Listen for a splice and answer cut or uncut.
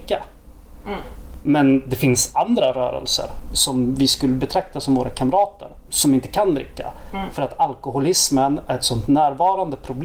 cut